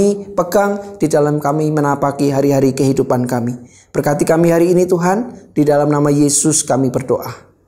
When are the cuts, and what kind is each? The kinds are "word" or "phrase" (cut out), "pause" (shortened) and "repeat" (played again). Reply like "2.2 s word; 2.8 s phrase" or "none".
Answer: none